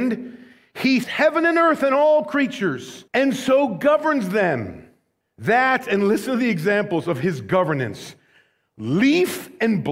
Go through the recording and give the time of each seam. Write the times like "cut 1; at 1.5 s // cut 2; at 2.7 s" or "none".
cut 1; at 1.0 s // cut 2; at 3.1 s // cut 3; at 5.2 s